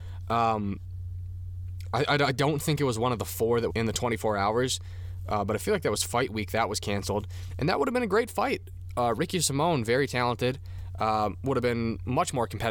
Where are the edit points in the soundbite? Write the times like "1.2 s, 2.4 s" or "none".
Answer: 3.7 s